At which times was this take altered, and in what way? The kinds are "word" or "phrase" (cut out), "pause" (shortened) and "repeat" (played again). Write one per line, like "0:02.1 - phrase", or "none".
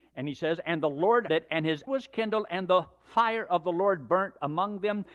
0:01.3 - word
0:01.9 - word